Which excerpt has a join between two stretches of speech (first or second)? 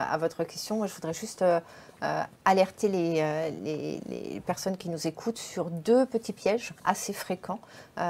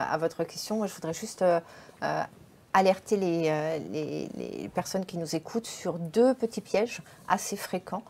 first